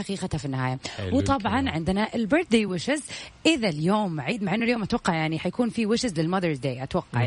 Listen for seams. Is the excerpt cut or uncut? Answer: uncut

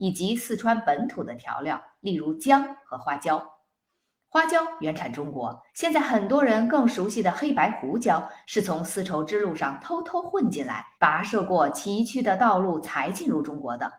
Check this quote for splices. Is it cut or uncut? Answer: cut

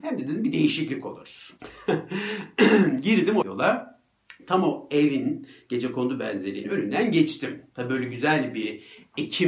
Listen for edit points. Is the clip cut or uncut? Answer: cut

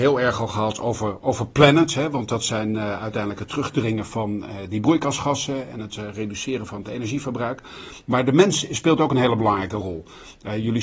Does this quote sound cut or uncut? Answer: uncut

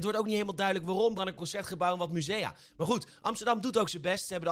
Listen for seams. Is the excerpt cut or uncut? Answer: cut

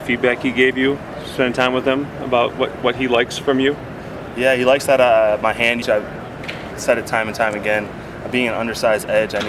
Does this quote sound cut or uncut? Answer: cut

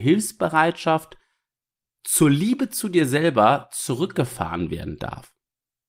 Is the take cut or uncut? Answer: uncut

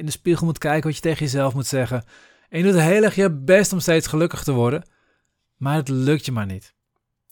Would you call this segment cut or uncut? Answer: uncut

